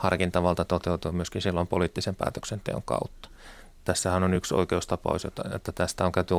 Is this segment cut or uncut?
uncut